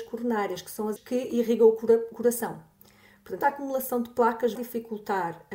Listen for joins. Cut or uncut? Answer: cut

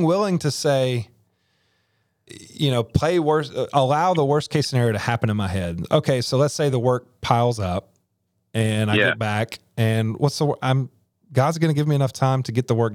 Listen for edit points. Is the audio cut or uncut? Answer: cut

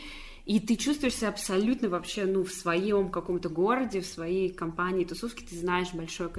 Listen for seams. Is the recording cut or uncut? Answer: uncut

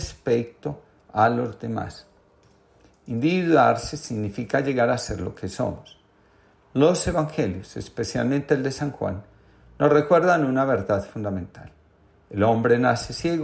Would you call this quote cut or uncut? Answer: uncut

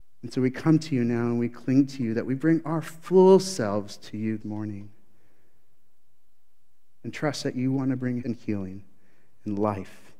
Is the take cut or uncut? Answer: cut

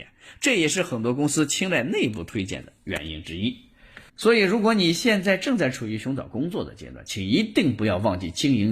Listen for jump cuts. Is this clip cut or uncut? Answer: cut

